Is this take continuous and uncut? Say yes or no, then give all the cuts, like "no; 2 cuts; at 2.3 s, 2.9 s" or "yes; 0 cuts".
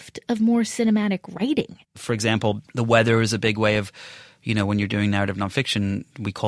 no; 1 cut; at 1.8 s